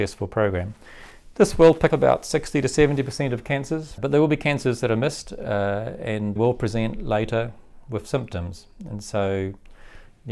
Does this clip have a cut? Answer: yes; 3 cuts; at 1.9 s, 4.0 s, 6.4 s

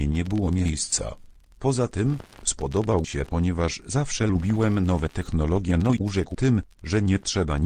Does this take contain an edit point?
yes; 4 cuts; at 2.4 s, 3.0 s, 6.0 s, 6.3 s

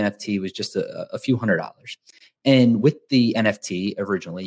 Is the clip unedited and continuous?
yes; 0 cuts

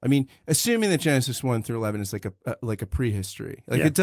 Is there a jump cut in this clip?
no; 0 cuts

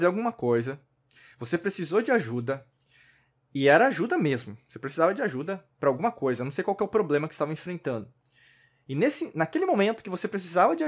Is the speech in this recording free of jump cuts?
yes; 0 cuts

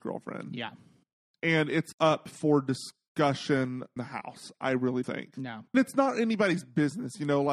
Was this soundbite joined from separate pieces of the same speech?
yes; 4 cuts; at 1.9 s, 4.0 s, 5.0 s, 5.7 s

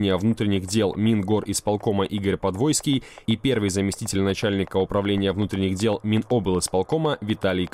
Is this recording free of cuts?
yes; 0 cuts

